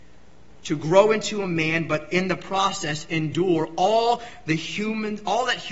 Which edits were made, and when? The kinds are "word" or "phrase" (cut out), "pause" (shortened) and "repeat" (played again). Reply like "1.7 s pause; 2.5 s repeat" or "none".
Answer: none